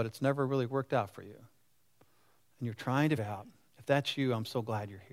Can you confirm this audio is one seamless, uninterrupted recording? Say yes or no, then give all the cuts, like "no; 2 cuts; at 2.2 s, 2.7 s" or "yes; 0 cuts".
no; 1 cut; at 3.2 s